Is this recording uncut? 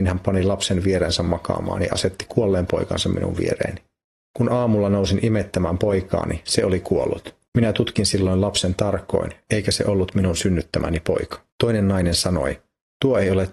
no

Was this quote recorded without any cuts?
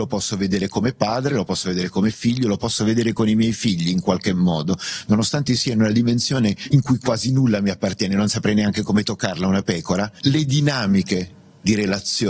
yes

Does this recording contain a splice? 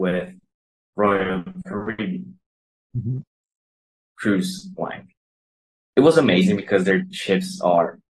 no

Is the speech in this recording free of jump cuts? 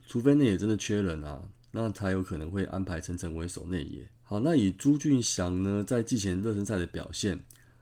no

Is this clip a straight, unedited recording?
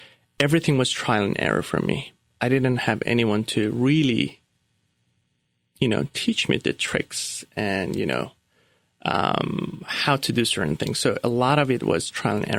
yes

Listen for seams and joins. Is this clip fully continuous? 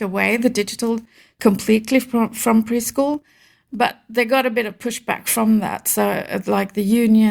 yes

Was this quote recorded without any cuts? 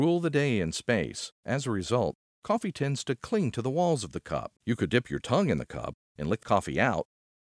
no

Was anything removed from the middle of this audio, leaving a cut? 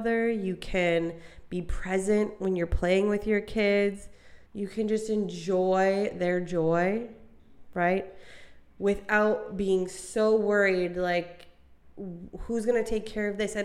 yes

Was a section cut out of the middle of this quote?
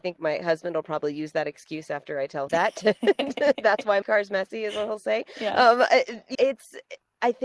yes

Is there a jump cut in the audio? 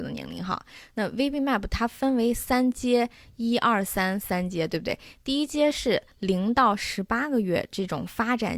no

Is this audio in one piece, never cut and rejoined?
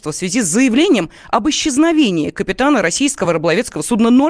yes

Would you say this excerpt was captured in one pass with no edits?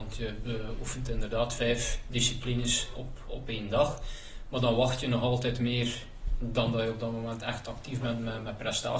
yes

